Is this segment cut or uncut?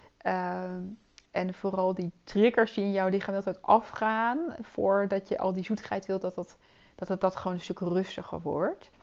uncut